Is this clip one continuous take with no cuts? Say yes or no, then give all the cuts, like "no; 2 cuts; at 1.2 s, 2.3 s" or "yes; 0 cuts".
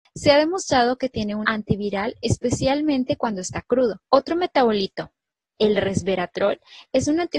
no; 2 cuts; at 1.4 s, 4.1 s